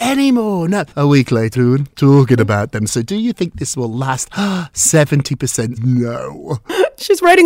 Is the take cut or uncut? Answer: cut